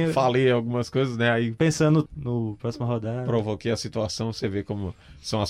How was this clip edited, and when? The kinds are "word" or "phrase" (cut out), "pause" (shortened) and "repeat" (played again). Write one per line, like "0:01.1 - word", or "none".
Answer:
0:02.1 - word

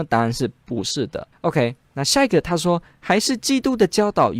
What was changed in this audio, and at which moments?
0:01.3 - pause

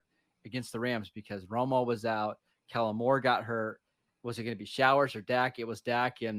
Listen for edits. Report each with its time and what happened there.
none

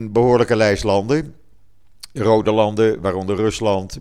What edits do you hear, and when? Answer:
none

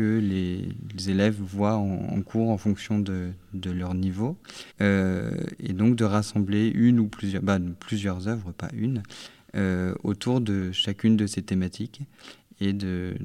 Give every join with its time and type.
0:04.7 - pause

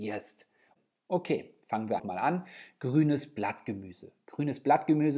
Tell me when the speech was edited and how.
0:02.0 - word

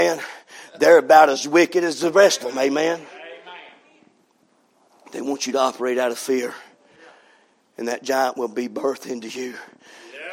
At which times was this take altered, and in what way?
0:02.4 - word

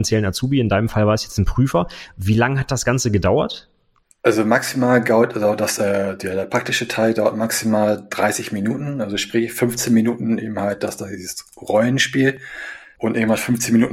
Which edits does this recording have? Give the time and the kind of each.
none

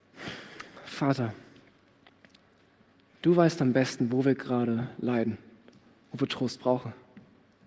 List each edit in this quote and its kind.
none

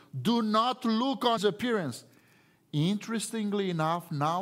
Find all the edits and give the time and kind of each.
0:01.4 - word

